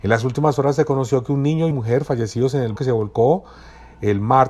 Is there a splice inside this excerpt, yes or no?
yes